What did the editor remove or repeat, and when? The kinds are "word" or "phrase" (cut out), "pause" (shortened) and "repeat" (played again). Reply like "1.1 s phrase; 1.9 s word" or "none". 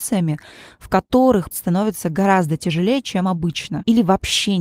1.5 s word